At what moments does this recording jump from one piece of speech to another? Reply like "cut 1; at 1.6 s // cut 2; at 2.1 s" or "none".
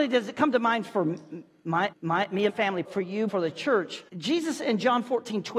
cut 1; at 1.9 s // cut 2; at 2.5 s // cut 3; at 2.8 s // cut 4; at 3.3 s // cut 5; at 4.1 s